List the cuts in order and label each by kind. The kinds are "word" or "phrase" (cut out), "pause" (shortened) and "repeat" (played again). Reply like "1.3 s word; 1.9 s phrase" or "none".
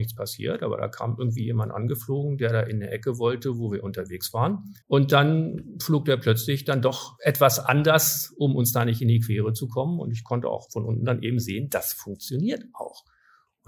4.8 s pause